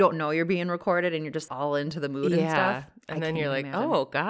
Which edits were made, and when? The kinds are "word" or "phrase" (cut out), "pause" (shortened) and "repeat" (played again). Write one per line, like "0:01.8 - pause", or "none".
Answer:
0:01.5 - word